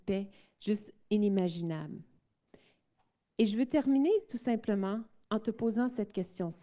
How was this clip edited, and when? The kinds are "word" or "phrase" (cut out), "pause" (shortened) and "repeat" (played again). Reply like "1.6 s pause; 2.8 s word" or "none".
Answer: none